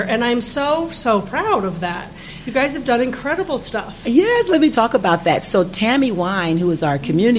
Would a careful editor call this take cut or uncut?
cut